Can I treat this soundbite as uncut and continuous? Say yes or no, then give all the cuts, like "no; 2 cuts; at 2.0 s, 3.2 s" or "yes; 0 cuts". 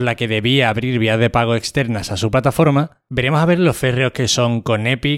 yes; 0 cuts